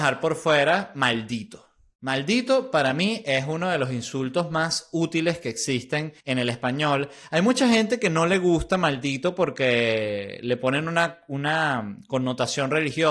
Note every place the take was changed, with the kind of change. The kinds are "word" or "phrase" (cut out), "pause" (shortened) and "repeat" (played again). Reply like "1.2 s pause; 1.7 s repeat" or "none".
6.2 s pause